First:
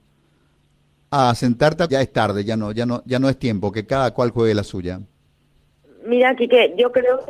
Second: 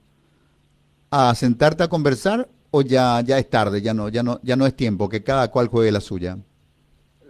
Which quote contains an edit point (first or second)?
first